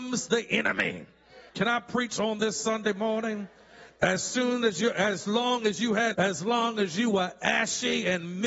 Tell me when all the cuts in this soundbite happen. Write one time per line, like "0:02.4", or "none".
0:01.5
0:06.1

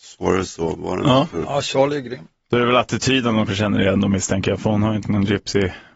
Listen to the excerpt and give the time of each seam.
0:03.5
0:05.0

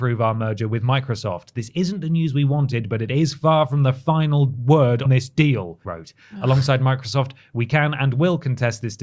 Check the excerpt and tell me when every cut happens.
0:05.1
0:05.8

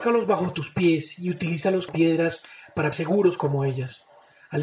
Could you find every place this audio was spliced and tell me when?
0:01.9
0:02.9

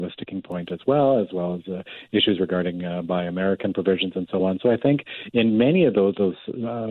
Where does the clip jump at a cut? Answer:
none

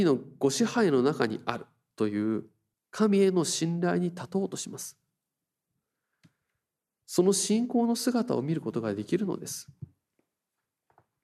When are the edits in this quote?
0:02.7

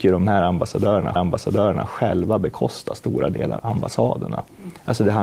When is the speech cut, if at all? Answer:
0:01.2
0:03.6

